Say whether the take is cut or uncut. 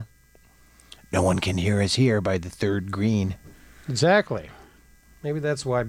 uncut